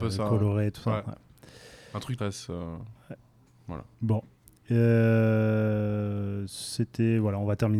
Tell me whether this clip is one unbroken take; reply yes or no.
no